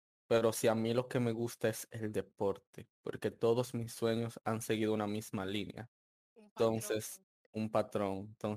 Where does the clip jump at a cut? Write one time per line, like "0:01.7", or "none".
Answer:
0:02.9
0:06.1

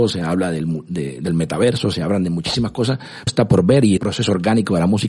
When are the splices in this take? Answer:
0:03.3
0:04.0

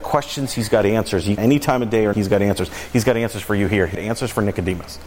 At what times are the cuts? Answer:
0:01.4
0:02.1
0:03.9

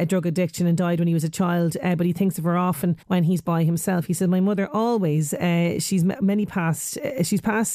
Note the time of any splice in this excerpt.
0:03.0

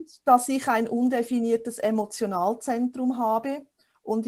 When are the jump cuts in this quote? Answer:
none

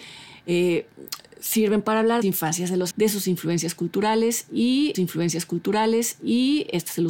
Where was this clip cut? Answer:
0:02.2
0:02.9
0:04.9

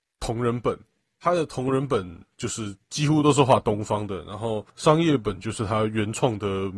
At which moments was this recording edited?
0:04.7

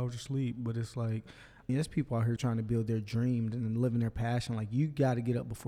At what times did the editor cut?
0:01.7
0:02.4

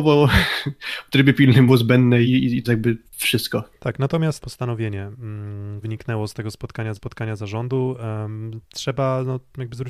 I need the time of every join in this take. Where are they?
0:01.7
0:02.2
0:02.6
0:03.1
0:04.4
0:05.8
0:06.9

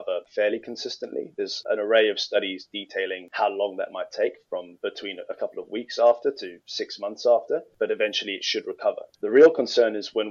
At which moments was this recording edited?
0:09.1

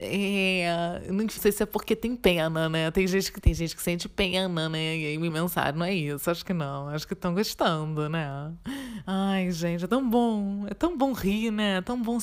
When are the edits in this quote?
0:01.4
0:03.4
0:05.3

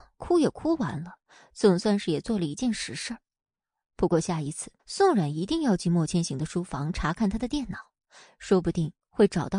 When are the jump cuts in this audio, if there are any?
0:04.8

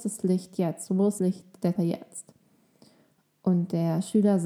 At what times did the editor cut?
0:01.2
0:01.7

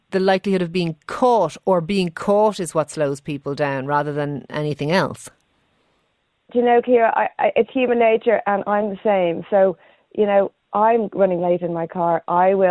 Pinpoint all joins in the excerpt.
none

